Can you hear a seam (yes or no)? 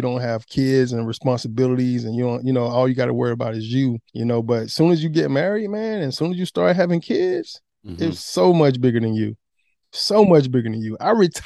yes